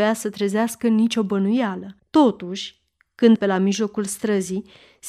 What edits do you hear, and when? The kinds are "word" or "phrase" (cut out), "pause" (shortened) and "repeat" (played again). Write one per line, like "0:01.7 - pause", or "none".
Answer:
0:02.0 - pause
0:03.4 - word